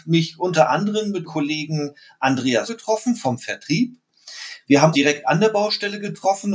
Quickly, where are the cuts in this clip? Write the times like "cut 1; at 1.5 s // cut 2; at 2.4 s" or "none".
cut 1; at 1.3 s // cut 2; at 2.7 s // cut 3; at 4.9 s